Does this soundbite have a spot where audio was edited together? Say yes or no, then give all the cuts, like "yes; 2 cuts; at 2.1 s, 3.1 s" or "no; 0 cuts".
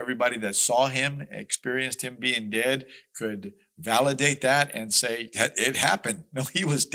no; 0 cuts